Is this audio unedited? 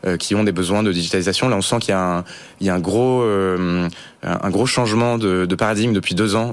yes; 0 cuts

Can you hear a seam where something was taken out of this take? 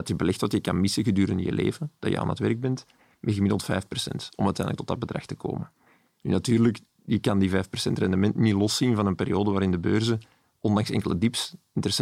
no; 0 cuts

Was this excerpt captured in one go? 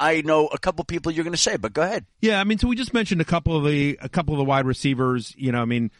yes; 0 cuts

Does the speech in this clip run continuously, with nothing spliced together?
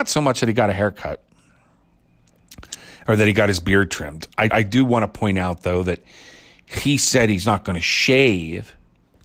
no; 1 cut; at 4.5 s

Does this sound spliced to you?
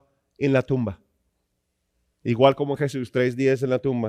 no; 0 cuts

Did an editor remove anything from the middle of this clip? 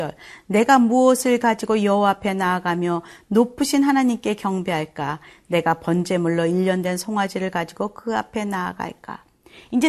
no; 0 cuts

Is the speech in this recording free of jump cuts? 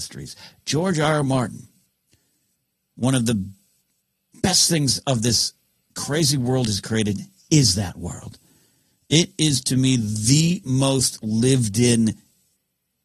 yes; 0 cuts

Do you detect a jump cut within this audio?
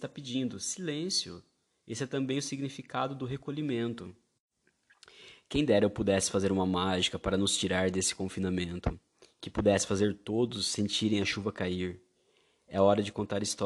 no; 0 cuts

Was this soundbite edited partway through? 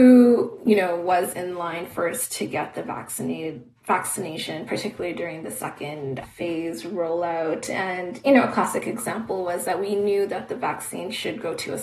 yes; 1 cut; at 6.2 s

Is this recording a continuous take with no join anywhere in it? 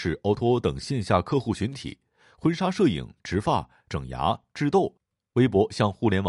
yes; 0 cuts

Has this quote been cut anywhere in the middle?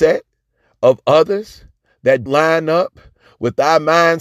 yes; 1 cut; at 2.3 s

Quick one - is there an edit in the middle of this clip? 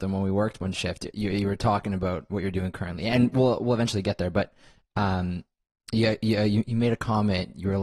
no; 0 cuts

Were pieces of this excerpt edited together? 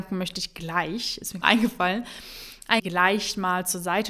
yes; 2 cuts; at 1.4 s, 2.8 s

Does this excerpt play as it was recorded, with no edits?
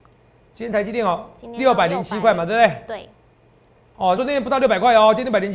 no; 1 cut; at 4.2 s

